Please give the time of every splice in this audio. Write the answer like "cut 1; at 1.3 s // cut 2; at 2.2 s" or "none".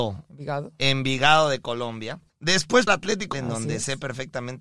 cut 1; at 2.9 s // cut 2; at 3.3 s